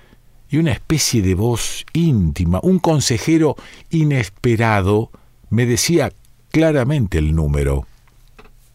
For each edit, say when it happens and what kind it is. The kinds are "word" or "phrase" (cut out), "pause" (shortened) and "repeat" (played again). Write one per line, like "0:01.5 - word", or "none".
none